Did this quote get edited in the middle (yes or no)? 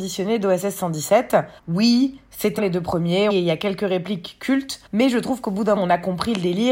yes